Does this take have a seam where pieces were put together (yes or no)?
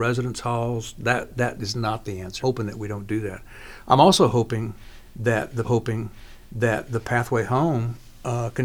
yes